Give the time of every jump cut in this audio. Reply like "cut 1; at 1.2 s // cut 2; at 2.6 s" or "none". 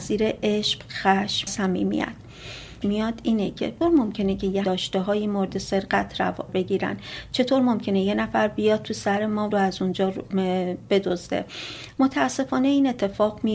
cut 1; at 1.5 s // cut 2; at 2.8 s // cut 3; at 3.8 s // cut 4; at 4.6 s // cut 5; at 6.5 s // cut 6; at 9.5 s